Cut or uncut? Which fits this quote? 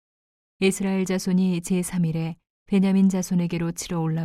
uncut